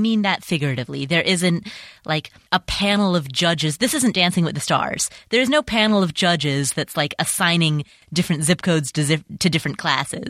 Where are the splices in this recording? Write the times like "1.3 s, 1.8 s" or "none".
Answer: none